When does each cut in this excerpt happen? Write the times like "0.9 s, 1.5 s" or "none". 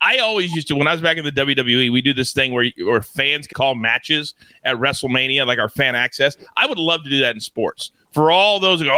3.5 s